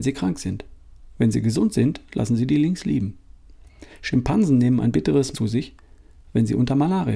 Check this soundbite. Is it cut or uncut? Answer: cut